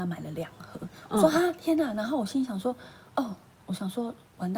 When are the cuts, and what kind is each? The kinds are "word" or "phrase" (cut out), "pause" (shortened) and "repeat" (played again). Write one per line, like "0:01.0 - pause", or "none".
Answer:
none